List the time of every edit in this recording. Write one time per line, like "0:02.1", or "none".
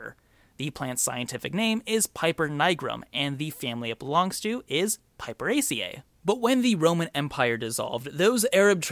0:06.1